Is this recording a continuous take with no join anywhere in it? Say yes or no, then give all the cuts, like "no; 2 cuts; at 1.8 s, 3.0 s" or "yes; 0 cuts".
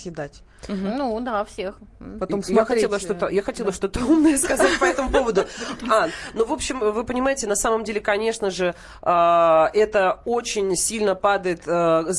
yes; 0 cuts